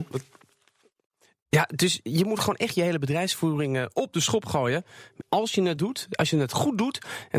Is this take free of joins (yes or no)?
no